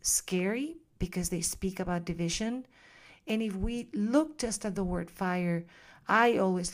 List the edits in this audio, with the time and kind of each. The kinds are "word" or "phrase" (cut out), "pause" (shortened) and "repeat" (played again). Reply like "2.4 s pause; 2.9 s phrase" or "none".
none